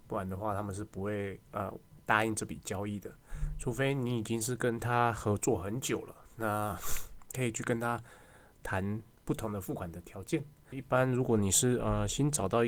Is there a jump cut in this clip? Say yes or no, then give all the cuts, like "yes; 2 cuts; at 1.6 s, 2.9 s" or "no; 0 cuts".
yes; 1 cut; at 10.7 s